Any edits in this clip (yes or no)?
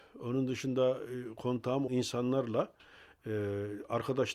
yes